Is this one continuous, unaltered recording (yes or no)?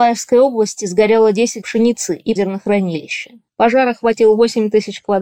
no